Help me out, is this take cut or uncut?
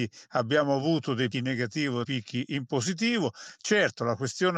cut